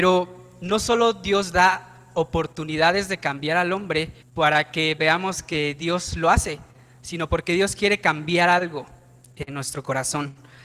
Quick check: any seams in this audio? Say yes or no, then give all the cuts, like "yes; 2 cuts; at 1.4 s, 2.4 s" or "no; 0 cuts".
yes; 1 cut; at 4.2 s